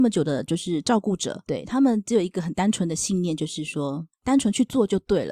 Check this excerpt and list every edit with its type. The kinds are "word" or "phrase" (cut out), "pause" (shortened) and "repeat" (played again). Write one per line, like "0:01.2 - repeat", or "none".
0:01.5 - word